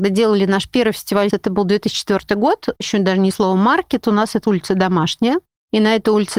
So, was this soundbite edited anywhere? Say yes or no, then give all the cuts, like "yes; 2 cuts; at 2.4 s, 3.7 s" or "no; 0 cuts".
yes; 4 cuts; at 1.3 s, 2.8 s, 3.3 s, 4.4 s